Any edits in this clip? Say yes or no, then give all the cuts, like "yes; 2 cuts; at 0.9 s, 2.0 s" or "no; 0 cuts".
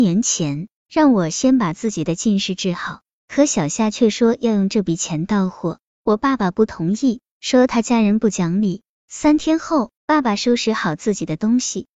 yes; 1 cut; at 10.0 s